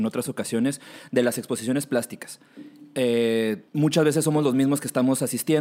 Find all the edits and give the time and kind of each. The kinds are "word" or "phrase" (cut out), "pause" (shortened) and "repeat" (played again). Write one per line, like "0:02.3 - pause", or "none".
0:03.7 - pause